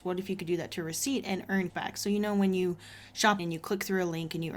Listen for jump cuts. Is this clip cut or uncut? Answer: cut